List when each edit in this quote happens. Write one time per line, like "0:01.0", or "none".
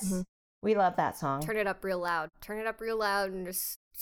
none